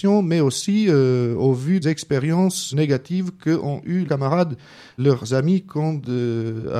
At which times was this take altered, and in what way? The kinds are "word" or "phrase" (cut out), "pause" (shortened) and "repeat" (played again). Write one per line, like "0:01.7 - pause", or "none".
0:01.8 - word
0:02.7 - word
0:04.1 - word
0:05.0 - word